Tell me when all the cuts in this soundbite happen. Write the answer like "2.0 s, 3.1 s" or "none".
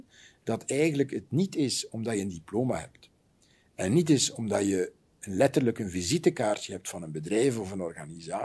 none